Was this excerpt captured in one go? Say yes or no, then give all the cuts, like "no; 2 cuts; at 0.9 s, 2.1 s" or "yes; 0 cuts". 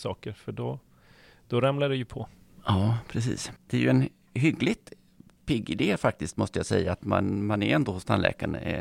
yes; 0 cuts